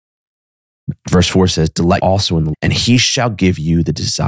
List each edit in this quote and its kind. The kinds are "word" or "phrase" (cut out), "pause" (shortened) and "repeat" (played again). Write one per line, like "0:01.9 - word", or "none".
0:02.0 - word
0:02.5 - word